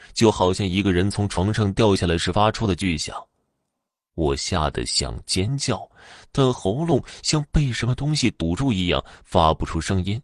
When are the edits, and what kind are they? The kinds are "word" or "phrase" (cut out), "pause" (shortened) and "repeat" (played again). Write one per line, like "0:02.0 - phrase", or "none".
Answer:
none